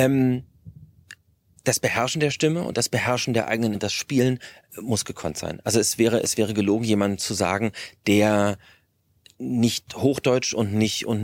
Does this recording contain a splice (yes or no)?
yes